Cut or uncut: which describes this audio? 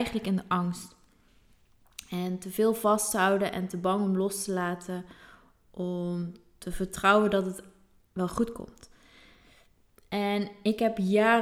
uncut